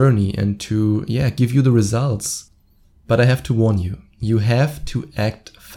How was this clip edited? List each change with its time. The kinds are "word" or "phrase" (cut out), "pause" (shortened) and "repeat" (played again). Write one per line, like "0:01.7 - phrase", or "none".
none

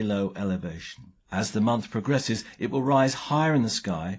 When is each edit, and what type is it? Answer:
0:01.2 - pause

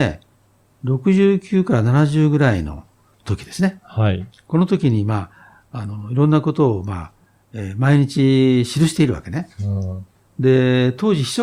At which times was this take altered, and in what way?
none

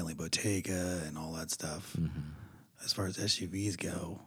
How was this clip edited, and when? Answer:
none

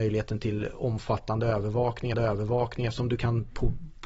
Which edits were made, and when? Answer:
0:02.1 - repeat

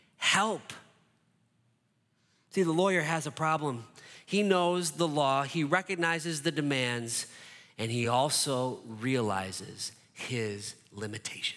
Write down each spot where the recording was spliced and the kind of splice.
none

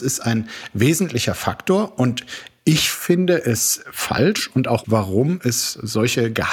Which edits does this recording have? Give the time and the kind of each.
0:04.8 - word

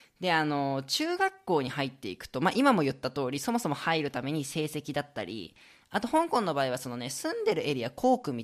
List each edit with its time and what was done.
none

